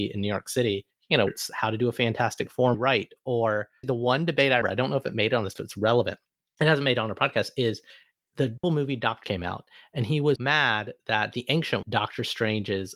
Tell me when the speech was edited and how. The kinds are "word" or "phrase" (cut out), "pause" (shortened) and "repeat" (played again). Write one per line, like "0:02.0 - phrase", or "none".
0:01.3 - word
0:02.7 - word
0:03.8 - word
0:04.6 - word
0:05.6 - word
0:08.6 - word
0:09.2 - word
0:10.4 - word
0:11.8 - word